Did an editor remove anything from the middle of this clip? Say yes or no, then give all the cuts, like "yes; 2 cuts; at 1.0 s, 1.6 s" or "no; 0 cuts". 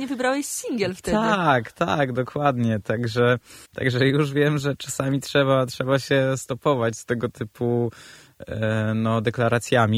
yes; 1 cut; at 3.6 s